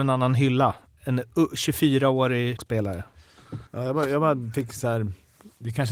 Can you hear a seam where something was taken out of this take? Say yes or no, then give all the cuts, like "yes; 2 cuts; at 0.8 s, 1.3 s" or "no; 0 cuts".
yes; 2 cuts; at 2.6 s, 3.7 s